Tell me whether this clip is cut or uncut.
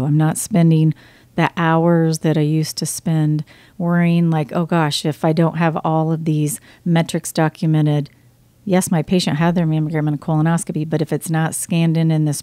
uncut